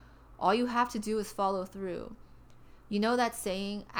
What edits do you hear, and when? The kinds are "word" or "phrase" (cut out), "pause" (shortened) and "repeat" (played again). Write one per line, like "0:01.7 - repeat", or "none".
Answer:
none